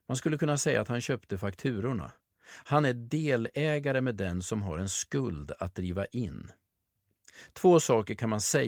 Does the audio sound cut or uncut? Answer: uncut